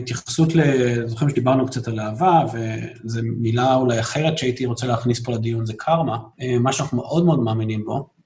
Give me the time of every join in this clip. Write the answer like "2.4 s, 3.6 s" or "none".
6.3 s

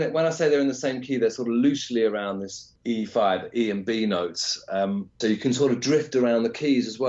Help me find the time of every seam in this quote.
5.2 s

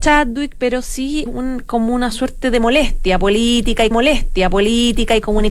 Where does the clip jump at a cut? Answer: 1.3 s, 3.9 s

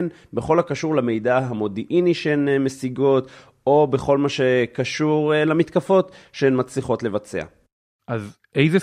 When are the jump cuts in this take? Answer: none

